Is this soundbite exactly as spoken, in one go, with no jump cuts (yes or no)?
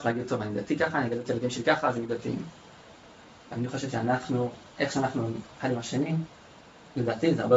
yes